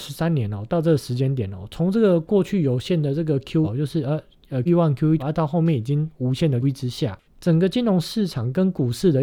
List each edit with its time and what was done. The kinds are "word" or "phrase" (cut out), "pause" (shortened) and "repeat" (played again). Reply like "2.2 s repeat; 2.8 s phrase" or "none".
3.6 s word; 4.7 s word; 5.2 s word; 6.6 s word; 7.2 s pause

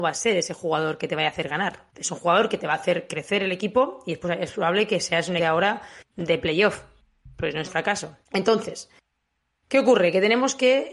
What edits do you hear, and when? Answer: 1.9 s pause; 5.4 s phrase; 6.1 s pause; 7.6 s word; 8.2 s pause

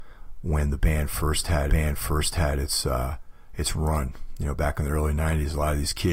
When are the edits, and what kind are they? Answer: 1.7 s repeat

